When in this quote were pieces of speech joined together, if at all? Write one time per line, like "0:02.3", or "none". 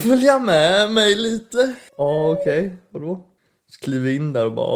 0:01.9
0:03.4